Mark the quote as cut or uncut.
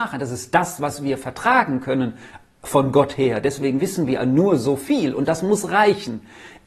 uncut